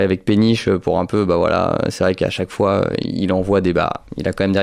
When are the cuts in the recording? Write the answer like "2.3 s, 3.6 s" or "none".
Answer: none